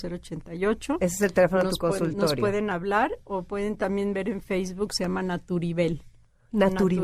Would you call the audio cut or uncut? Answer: uncut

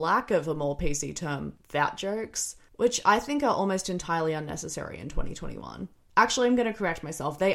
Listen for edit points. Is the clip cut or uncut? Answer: uncut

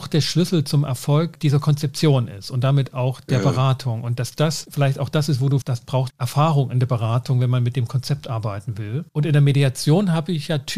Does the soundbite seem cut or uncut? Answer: cut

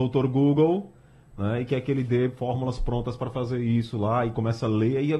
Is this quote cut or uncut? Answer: uncut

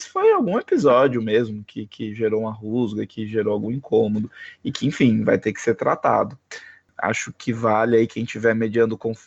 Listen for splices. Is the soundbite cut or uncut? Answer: uncut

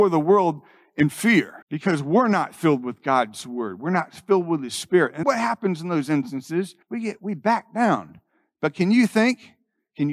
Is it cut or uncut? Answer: cut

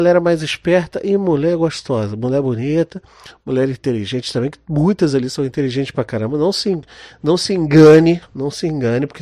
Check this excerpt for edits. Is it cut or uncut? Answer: uncut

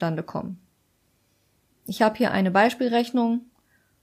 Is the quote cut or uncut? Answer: uncut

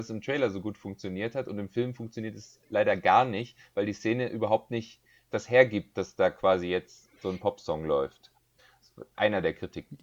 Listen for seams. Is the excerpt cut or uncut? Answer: uncut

